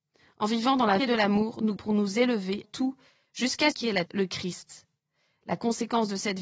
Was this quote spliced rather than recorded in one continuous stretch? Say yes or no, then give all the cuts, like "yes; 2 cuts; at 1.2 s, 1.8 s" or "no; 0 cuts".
yes; 5 cuts; at 1.0 s, 1.8 s, 2.6 s, 3.7 s, 4.1 s